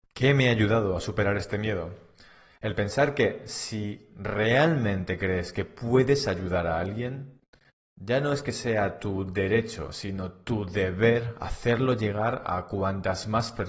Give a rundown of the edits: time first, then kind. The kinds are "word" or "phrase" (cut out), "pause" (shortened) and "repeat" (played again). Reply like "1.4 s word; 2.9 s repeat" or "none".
none